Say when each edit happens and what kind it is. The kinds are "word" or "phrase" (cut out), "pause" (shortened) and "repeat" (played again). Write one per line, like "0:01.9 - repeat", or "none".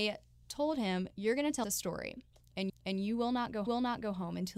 0:01.1 - pause
0:01.6 - word
0:02.7 - repeat
0:03.7 - repeat